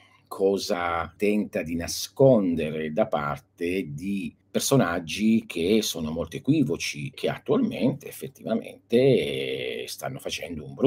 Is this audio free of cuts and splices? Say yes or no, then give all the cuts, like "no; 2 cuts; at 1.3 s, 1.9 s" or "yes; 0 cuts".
no; 3 cuts; at 1.2 s, 4.4 s, 7.1 s